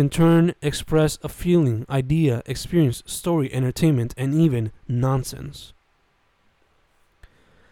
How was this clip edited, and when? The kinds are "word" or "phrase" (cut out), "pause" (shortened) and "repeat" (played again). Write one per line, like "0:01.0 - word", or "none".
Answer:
none